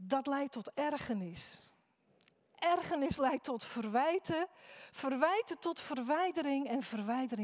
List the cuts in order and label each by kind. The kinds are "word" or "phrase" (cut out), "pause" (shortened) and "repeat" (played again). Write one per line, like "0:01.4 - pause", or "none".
none